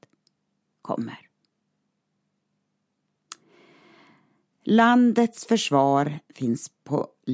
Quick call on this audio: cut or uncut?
uncut